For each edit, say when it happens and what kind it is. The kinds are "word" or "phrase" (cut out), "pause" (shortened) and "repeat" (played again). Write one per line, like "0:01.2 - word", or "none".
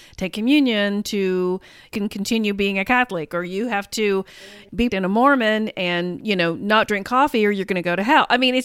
0:04.9 - word